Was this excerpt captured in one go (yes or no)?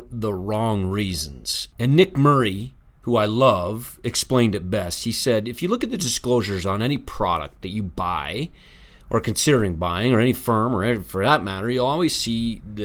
yes